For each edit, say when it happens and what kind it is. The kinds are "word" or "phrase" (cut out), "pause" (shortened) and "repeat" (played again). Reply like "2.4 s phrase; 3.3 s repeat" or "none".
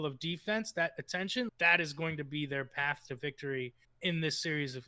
1.5 s word; 3.8 s pause